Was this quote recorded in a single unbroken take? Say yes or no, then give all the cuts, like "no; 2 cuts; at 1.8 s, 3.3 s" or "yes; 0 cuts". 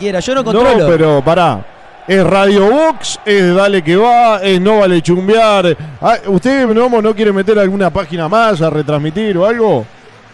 yes; 0 cuts